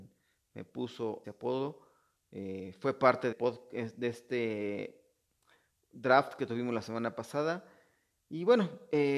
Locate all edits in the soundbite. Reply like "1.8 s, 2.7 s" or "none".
1.2 s, 3.3 s